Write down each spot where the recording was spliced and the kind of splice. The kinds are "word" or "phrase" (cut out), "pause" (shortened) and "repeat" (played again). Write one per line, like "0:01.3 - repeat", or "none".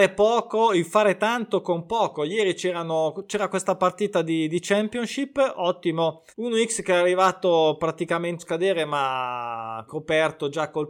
0:06.3 - pause
0:08.4 - word
0:09.9 - word